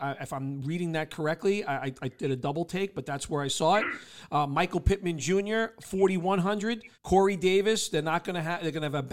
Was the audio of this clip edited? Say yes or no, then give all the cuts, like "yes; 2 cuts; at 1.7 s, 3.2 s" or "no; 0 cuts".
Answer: yes; 1 cut; at 6.9 s